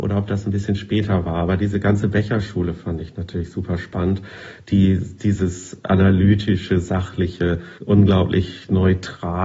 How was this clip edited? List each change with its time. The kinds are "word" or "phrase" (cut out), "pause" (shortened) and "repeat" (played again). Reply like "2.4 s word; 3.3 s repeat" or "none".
7.8 s pause